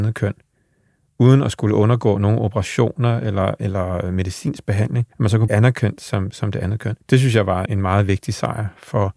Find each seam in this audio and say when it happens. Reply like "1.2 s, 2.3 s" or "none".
5.1 s, 5.5 s, 7.0 s, 7.7 s